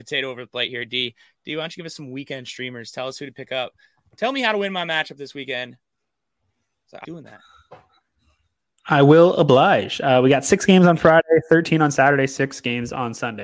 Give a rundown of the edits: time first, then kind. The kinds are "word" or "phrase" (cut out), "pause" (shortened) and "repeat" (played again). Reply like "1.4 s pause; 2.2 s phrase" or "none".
7.0 s word